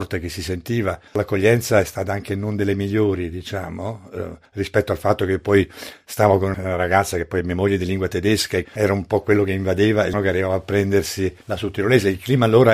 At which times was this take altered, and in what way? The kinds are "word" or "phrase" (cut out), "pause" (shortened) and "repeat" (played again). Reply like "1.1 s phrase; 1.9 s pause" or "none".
1.1 s pause; 4.5 s pause; 6.5 s word; 8.6 s word; 10.1 s word; 11.4 s pause